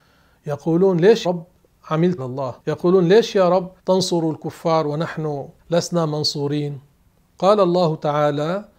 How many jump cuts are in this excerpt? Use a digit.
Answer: 5